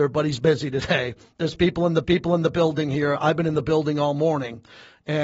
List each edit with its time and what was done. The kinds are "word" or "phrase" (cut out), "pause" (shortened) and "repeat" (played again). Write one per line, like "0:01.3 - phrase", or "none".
0:02.0 - repeat